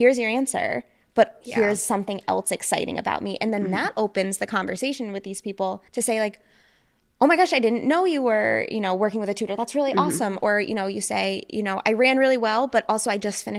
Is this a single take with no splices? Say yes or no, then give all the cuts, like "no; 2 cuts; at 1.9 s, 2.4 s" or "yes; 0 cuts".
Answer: no; 2 cuts; at 1.4 s, 5.9 s